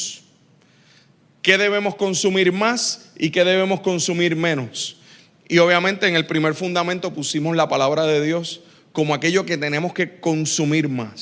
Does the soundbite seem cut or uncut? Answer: uncut